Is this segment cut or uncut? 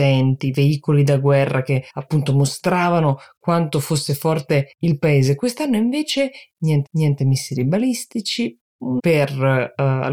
cut